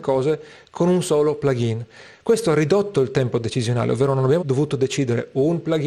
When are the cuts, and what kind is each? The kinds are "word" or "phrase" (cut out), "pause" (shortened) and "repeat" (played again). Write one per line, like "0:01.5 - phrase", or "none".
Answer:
0:04.4 - word